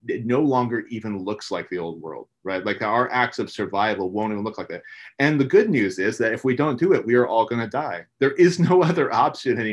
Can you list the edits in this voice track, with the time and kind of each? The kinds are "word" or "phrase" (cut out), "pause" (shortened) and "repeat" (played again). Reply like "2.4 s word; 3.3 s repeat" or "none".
none